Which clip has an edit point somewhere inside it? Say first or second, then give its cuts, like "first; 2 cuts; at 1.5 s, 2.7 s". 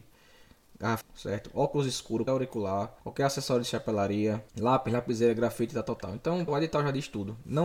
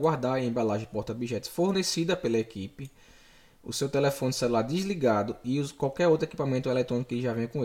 first; 5 cuts; at 1.0 s, 2.3 s, 3.0 s, 4.5 s, 6.5 s